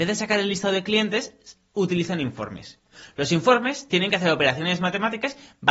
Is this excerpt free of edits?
yes; 0 cuts

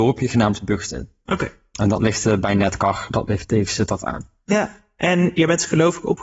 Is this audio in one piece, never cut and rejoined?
yes; 0 cuts

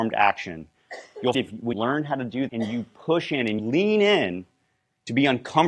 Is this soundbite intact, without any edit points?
no; 4 cuts; at 1.3 s, 1.7 s, 2.5 s, 3.6 s

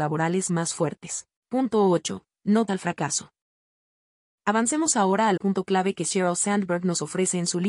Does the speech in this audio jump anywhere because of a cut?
yes; 3 cuts; at 1.4 s, 2.7 s, 5.4 s

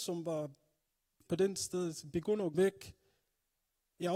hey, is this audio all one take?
no; 2 cuts; at 1.3 s, 2.5 s

